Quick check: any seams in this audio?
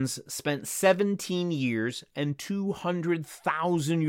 no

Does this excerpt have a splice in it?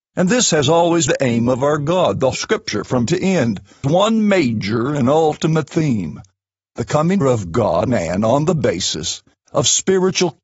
yes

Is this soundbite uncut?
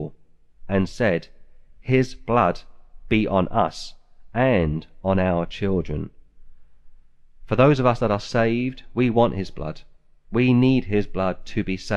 yes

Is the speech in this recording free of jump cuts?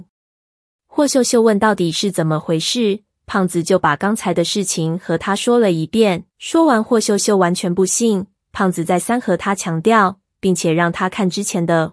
no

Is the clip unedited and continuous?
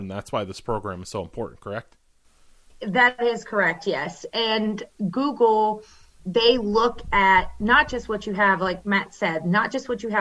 yes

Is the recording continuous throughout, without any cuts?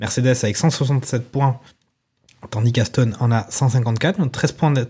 yes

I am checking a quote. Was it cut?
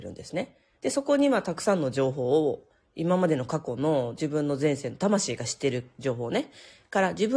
no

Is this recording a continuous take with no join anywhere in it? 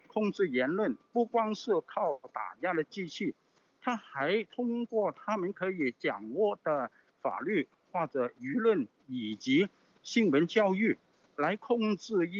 yes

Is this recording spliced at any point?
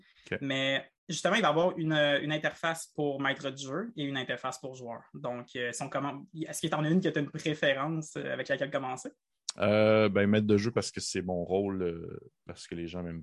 yes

